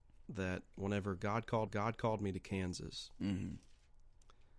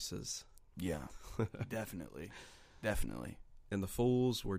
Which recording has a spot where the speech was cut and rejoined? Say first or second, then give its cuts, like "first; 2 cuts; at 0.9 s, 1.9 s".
first; 1 cut; at 1.7 s